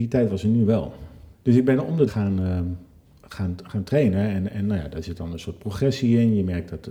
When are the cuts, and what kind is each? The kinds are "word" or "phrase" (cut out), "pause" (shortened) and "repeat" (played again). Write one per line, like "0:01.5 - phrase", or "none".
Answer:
0:01.3 - pause
0:02.1 - phrase